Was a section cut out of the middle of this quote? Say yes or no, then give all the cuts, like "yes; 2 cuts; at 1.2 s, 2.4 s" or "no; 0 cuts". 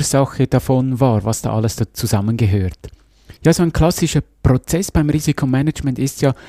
yes; 1 cut; at 3.4 s